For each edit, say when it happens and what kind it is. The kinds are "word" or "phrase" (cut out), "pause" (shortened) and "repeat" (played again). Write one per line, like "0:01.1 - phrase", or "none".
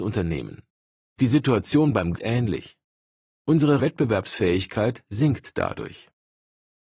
0:02.1 - phrase
0:03.8 - word